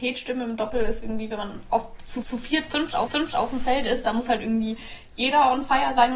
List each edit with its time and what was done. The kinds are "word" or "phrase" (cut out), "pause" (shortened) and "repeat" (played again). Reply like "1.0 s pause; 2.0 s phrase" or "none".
2.2 s repeat; 3.1 s repeat